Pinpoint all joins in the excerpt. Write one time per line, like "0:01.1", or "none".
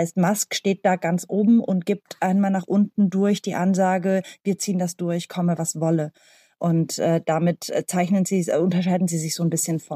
none